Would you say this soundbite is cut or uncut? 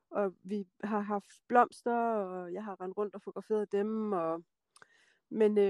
uncut